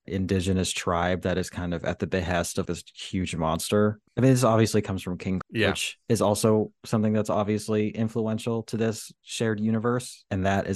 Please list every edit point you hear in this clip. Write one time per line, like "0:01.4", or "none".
0:02.7
0:05.4